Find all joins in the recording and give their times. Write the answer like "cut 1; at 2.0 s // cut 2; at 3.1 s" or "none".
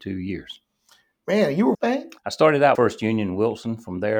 cut 1; at 1.7 s // cut 2; at 2.2 s // cut 3; at 2.7 s